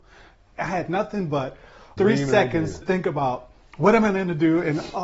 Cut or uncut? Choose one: cut